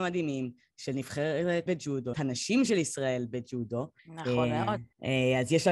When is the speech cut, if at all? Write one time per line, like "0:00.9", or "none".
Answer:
0:01.7
0:02.1
0:04.0